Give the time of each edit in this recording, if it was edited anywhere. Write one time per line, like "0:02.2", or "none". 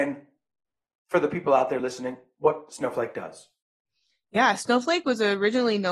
none